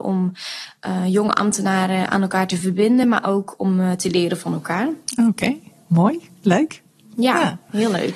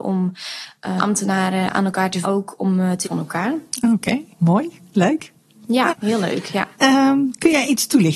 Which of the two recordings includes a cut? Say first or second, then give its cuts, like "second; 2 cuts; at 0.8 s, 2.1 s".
second; 6 cuts; at 1.0 s, 2.2 s, 3.0 s, 4.3 s, 5.9 s, 6.7 s